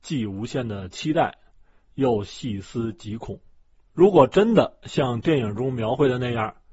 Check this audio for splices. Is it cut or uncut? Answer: uncut